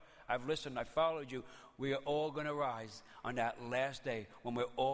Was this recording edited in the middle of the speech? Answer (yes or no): no